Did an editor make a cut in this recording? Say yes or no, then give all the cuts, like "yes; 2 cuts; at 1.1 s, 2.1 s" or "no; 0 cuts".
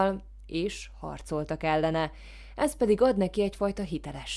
no; 0 cuts